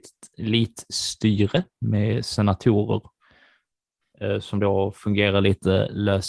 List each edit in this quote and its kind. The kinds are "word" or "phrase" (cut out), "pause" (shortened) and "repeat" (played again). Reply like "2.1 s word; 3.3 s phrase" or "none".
none